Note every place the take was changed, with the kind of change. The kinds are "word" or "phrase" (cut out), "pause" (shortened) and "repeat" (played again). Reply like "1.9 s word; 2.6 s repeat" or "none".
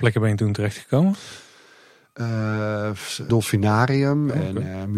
3.3 s word